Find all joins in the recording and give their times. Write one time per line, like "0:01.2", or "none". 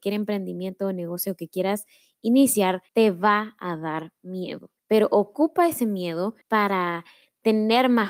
0:02.9
0:04.8
0:06.4